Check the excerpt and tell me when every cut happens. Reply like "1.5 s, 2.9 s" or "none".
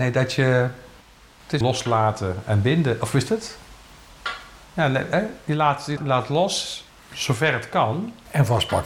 1.0 s, 1.6 s, 4.6 s, 6.0 s, 6.9 s